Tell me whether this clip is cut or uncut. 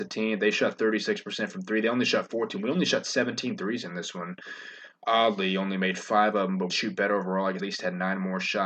cut